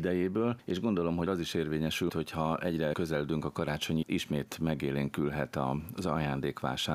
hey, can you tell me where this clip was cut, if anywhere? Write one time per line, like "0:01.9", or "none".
0:01.3
0:02.1
0:02.9
0:04.0